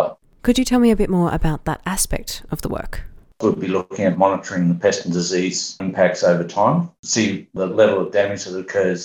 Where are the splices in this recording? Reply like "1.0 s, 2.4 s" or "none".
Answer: 7.0 s